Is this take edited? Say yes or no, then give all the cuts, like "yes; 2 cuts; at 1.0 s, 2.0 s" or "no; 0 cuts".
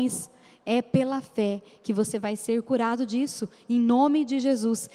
no; 0 cuts